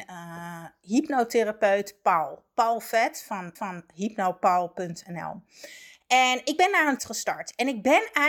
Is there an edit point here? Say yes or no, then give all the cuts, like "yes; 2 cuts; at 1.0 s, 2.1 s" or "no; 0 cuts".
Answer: yes; 2 cuts; at 3.6 s, 7.0 s